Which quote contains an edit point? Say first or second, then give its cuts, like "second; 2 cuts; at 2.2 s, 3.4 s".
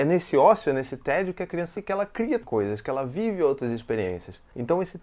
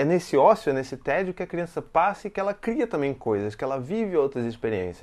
first; 2 cuts; at 1.7 s, 2.4 s